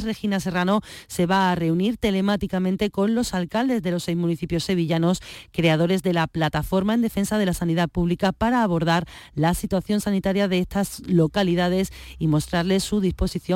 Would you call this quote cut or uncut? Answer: uncut